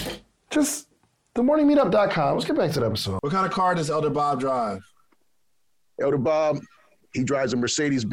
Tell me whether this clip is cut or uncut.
uncut